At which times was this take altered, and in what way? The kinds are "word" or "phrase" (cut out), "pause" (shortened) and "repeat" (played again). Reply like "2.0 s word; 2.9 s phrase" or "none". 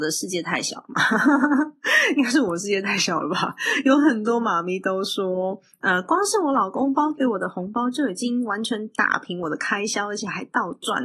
none